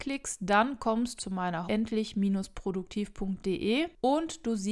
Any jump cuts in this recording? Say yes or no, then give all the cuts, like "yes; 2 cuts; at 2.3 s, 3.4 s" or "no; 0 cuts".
yes; 2 cuts; at 1.2 s, 1.7 s